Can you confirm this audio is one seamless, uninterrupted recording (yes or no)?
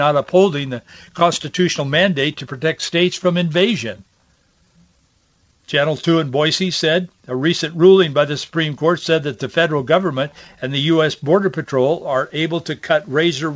yes